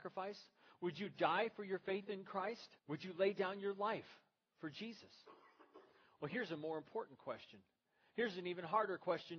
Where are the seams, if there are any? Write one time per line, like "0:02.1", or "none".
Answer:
0:02.8